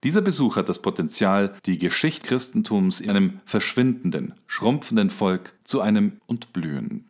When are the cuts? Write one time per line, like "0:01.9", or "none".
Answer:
0:01.6
0:02.2
0:03.1
0:05.6
0:06.2